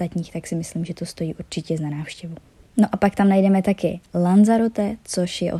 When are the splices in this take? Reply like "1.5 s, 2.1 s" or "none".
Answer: none